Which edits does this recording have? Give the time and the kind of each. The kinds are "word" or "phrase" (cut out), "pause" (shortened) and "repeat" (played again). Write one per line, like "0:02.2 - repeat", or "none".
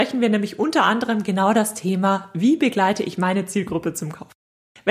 none